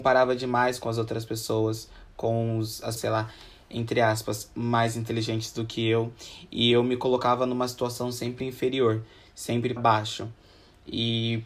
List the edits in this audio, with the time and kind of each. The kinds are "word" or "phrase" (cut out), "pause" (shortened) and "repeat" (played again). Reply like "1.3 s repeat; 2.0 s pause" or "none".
3.0 s word; 9.8 s word

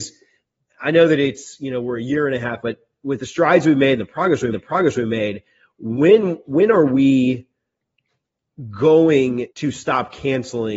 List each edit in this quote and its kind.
2.6 s phrase; 4.5 s repeat; 9.5 s pause

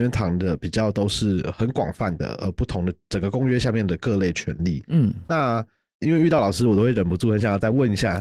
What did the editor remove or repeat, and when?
none

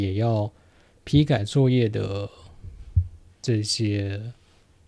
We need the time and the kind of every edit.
3.3 s pause

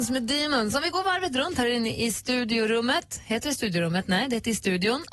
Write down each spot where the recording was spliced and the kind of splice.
none

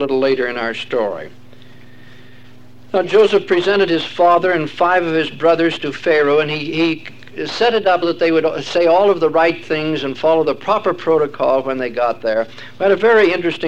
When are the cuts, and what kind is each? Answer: 8.0 s word

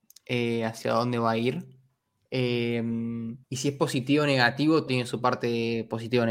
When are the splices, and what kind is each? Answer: 3.4 s pause; 4.9 s word

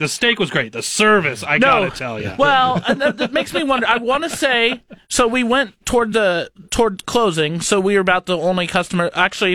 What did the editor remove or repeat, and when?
none

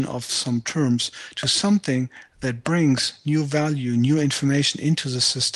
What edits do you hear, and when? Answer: none

